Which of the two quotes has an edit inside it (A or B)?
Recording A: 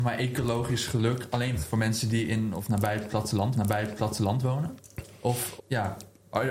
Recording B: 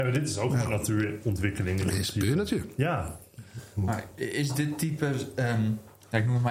A